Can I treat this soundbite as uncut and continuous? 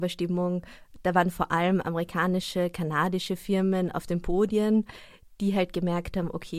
yes; 0 cuts

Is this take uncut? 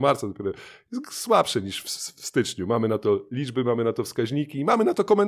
yes; 0 cuts

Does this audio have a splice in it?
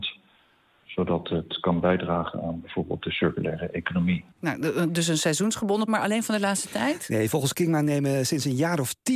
yes; 1 cut; at 5.9 s

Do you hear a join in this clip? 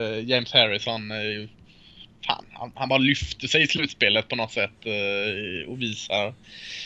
no; 0 cuts

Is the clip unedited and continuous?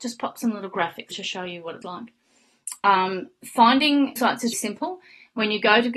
no; 4 cuts; at 1.1 s, 1.8 s, 4.2 s, 4.5 s

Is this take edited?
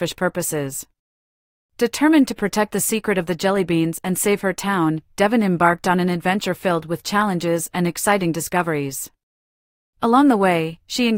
no; 0 cuts

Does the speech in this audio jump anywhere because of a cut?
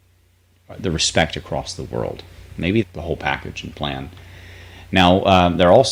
yes; 1 cut; at 2.8 s

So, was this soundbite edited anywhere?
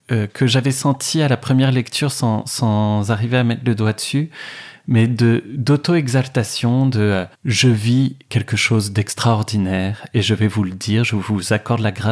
yes; 1 cut; at 7.3 s

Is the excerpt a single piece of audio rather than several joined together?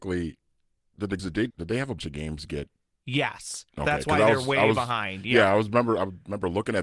no; 3 cuts; at 1.2 s, 1.5 s, 2.0 s

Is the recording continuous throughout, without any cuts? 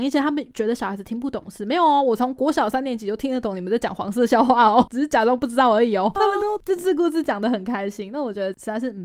no; 1 cut; at 6.2 s

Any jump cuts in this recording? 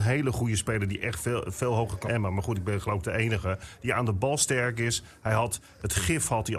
yes; 1 cut; at 2.0 s

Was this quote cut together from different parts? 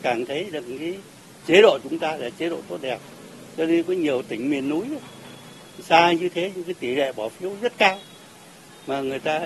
no; 0 cuts

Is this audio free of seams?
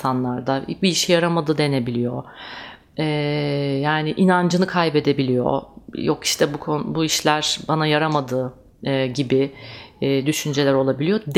yes; 0 cuts

